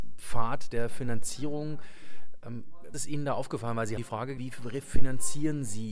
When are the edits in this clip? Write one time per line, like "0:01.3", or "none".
0:02.9
0:04.0
0:04.4

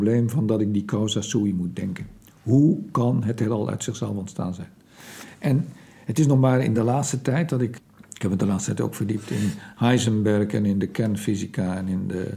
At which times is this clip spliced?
none

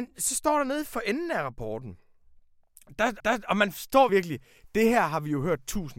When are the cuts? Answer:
0:03.2
0:04.1

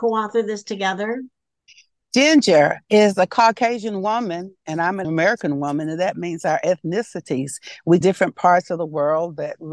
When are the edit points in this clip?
0:02.8
0:05.0
0:08.0

